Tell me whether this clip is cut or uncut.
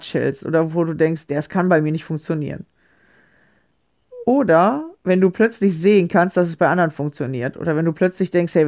cut